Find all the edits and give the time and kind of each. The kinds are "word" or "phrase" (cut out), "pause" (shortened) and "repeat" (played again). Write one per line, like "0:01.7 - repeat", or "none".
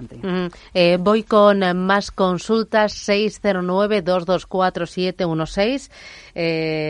none